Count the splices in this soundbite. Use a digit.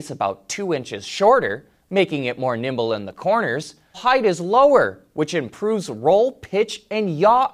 1